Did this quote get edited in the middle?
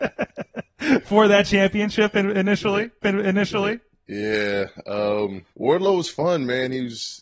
yes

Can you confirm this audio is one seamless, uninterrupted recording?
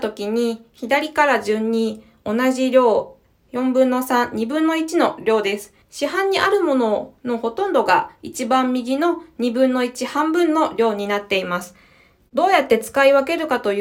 no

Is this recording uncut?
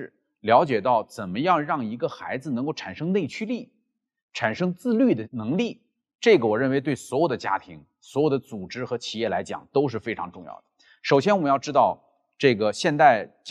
yes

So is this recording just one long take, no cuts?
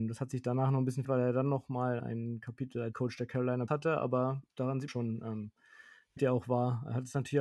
no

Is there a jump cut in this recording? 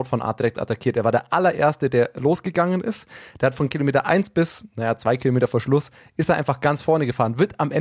no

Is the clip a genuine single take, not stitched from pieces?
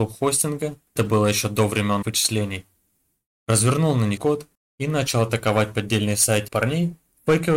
no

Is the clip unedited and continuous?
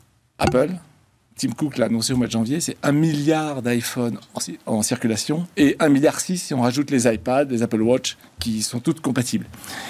yes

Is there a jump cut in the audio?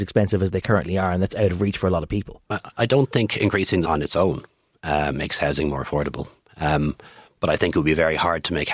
yes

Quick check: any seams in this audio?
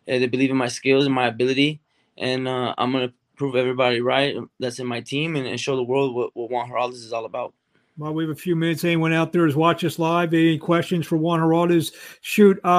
no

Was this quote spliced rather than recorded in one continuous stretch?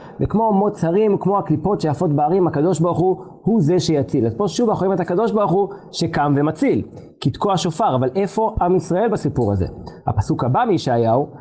no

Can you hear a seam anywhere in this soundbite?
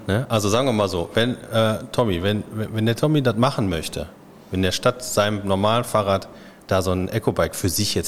no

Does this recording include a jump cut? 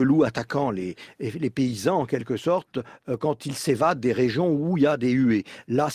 no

